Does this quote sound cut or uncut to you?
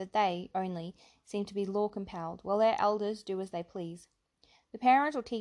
uncut